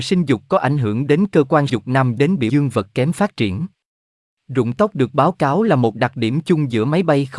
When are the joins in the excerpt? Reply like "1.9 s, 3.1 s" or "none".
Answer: 1.7 s, 2.2 s, 2.5 s